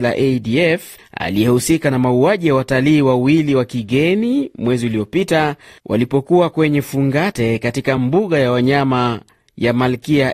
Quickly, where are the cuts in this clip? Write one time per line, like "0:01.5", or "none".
none